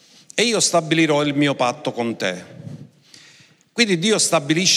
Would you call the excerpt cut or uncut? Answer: uncut